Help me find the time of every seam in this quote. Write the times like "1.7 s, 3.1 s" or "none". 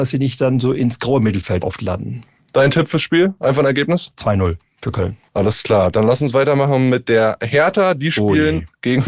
1.6 s